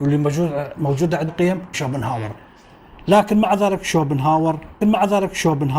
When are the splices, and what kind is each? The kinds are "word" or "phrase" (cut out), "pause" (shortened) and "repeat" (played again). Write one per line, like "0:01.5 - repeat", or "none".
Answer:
0:01.3 - word
0:01.7 - word
0:04.8 - repeat